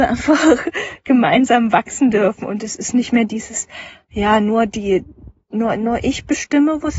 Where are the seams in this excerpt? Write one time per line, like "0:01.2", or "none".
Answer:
none